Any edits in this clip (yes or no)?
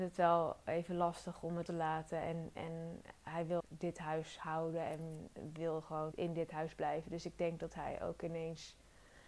yes